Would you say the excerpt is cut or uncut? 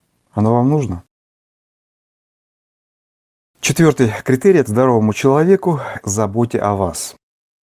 cut